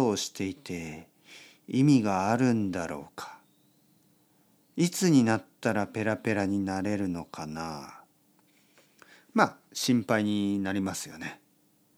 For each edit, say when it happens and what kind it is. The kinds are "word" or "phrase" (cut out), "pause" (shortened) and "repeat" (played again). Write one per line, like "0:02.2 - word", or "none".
0:09.6 - pause